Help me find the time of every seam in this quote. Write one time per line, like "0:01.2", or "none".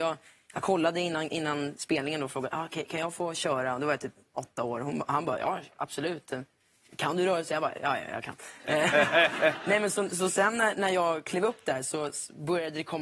none